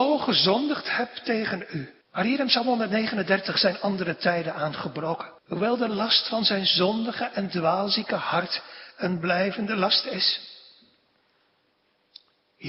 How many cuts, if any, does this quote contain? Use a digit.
2